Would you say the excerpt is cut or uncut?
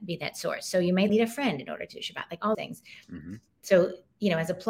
cut